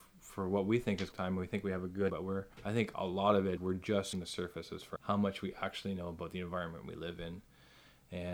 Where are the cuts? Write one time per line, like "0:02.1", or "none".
0:01.1
0:02.1
0:02.5
0:03.6
0:04.1
0:05.0